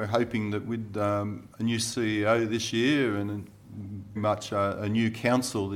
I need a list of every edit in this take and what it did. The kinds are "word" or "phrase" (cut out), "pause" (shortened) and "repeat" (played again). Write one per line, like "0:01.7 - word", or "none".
0:04.2 - word